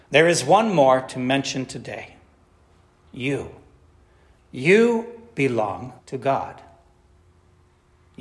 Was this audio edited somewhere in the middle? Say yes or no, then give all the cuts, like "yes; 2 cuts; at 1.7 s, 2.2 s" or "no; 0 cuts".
yes; 1 cut; at 6.0 s